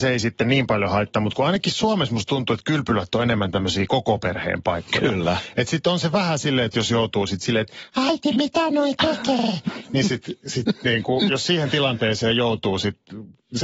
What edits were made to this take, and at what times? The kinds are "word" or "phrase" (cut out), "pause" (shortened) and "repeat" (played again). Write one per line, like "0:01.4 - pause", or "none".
none